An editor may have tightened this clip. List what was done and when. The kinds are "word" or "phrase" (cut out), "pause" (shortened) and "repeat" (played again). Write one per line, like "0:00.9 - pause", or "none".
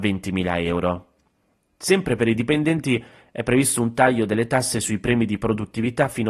none